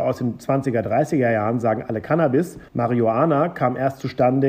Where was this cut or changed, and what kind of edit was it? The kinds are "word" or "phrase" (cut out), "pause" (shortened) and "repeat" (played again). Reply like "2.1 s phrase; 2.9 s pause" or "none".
2.7 s pause